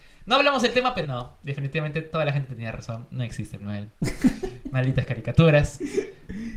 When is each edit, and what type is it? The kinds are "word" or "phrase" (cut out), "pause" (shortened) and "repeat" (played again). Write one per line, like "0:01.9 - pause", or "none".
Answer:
0:01.0 - phrase
0:03.6 - word